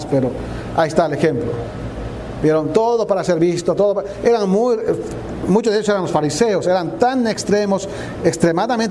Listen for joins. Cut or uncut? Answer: uncut